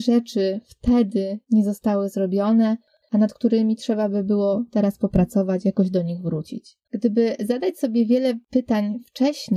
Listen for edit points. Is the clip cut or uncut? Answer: cut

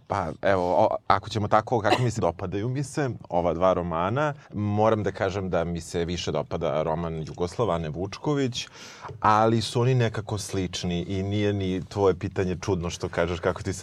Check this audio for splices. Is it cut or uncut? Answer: cut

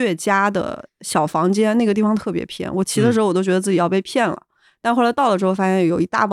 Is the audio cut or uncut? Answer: uncut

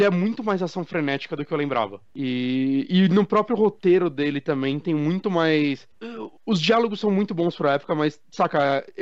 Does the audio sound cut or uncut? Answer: uncut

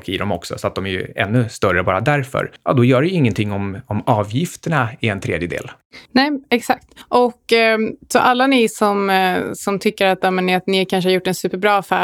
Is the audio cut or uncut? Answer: uncut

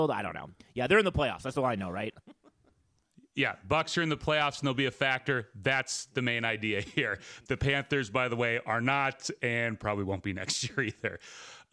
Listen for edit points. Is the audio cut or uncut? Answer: uncut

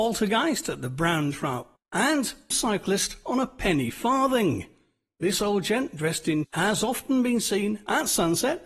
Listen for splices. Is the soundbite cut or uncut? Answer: cut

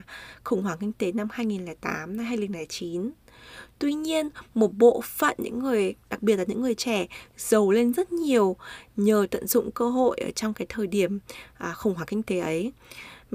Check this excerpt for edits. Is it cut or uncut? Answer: uncut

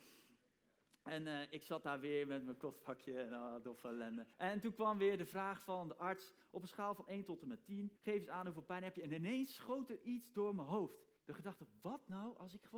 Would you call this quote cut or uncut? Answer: cut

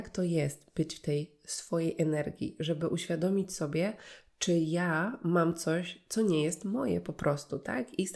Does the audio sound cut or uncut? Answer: uncut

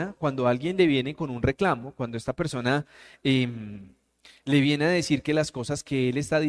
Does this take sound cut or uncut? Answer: uncut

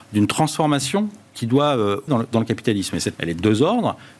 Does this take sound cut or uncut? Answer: cut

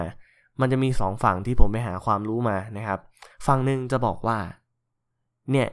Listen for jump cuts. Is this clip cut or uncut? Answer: cut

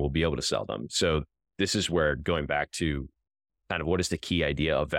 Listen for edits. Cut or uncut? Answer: uncut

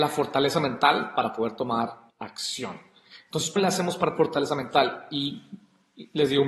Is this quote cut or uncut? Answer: cut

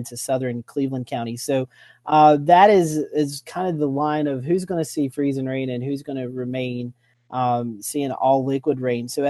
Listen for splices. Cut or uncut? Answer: uncut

